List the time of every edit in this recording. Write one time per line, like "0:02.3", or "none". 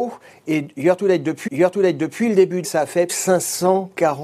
0:01.5
0:02.6
0:03.1